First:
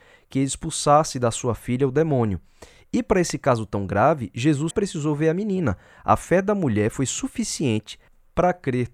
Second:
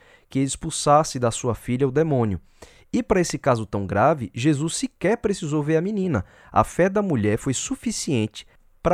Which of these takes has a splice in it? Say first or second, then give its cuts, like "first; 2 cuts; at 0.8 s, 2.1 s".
first; 1 cut; at 4.7 s